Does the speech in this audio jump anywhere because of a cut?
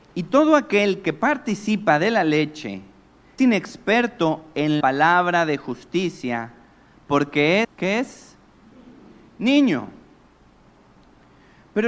yes; 3 cuts; at 3.4 s, 4.8 s, 7.6 s

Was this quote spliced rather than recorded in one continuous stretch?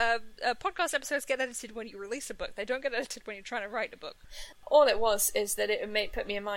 no; 0 cuts

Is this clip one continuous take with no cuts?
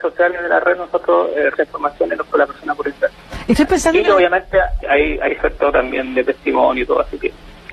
no; 4 cuts; at 1.5 s, 2.3 s, 4.8 s, 5.4 s

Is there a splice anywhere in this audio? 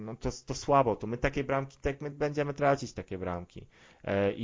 no; 0 cuts

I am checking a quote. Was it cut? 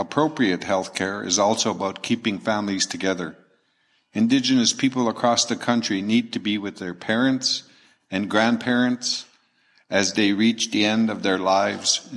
no; 0 cuts

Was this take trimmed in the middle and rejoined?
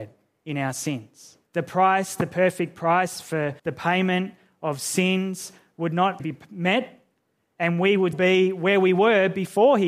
yes; 4 cuts; at 1.5 s, 3.6 s, 6.2 s, 8.1 s

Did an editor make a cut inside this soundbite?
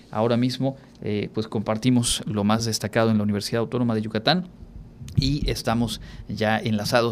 no; 0 cuts

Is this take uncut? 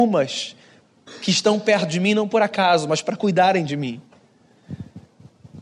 yes; 0 cuts

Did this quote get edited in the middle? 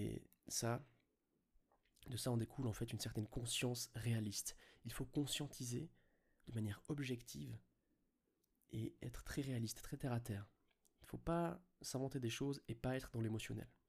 no; 0 cuts

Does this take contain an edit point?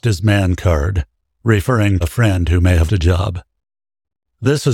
yes; 2 cuts; at 2.0 s, 2.9 s

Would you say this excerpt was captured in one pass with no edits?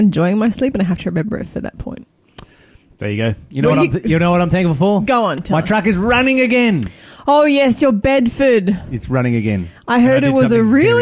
yes; 0 cuts

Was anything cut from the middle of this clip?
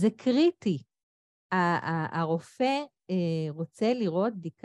no; 0 cuts

